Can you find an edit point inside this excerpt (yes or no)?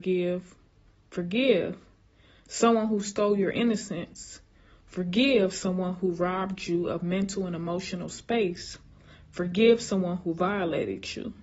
no